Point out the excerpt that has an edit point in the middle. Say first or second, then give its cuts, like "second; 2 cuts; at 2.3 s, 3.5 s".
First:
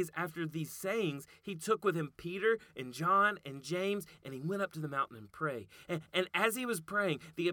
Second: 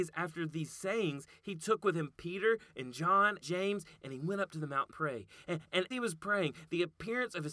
second; 3 cuts; at 3.4 s, 4.9 s, 5.9 s